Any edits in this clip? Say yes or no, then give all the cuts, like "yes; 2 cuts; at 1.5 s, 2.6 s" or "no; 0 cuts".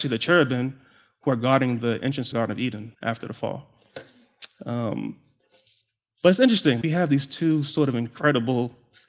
yes; 3 cuts; at 2.3 s, 2.9 s, 6.8 s